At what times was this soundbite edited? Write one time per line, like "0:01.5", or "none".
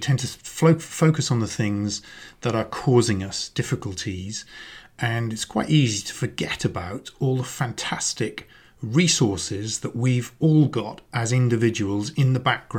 none